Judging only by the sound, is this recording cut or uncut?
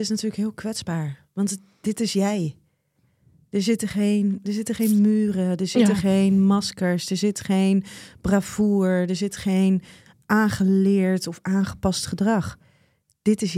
uncut